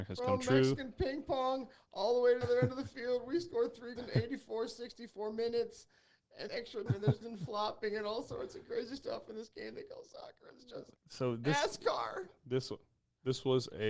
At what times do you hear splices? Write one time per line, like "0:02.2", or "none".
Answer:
0:02.4
0:04.0
0:06.5
0:06.9
0:07.2
0:11.0